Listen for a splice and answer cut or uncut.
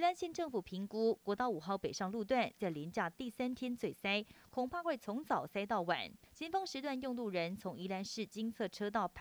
cut